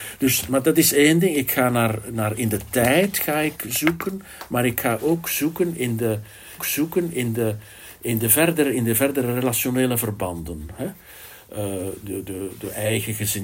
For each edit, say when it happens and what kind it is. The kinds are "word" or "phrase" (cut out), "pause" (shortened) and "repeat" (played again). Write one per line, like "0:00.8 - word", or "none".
0:06.6 - repeat